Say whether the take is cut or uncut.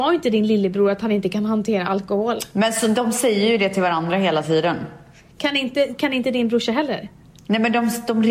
uncut